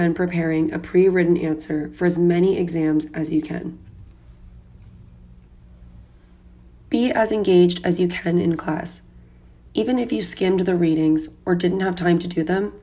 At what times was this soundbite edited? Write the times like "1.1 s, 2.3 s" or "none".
none